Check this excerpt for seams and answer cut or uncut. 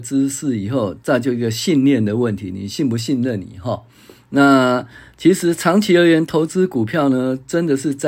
uncut